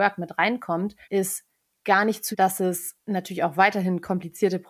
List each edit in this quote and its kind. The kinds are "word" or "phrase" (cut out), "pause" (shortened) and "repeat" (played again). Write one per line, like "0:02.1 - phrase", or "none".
0:01.0 - pause
0:02.3 - word
0:03.0 - pause